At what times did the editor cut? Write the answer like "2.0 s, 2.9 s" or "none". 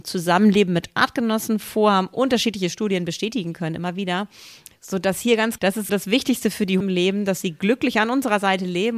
5.6 s, 5.9 s, 6.8 s